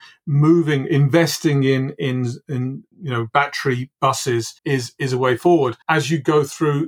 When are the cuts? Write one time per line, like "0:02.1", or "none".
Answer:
0:02.9
0:04.6
0:05.8